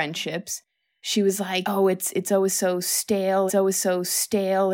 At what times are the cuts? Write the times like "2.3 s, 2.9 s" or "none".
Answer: 3.5 s